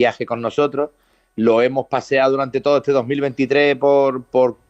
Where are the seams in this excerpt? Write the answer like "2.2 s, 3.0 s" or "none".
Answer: none